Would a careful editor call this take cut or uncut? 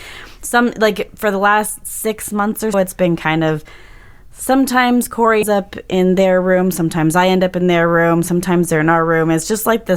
cut